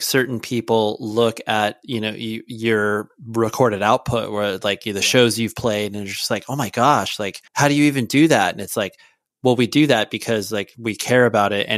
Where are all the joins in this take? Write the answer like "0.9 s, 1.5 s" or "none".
7.5 s